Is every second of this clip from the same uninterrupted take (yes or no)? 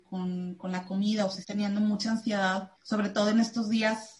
no